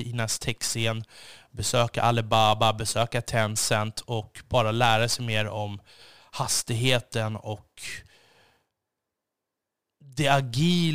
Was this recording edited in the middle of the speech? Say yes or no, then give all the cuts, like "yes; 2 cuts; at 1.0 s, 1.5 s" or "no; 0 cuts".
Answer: no; 0 cuts